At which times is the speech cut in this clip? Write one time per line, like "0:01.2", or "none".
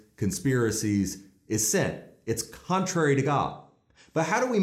none